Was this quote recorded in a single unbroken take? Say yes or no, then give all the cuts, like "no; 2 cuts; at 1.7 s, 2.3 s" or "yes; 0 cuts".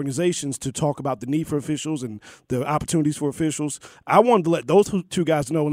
yes; 0 cuts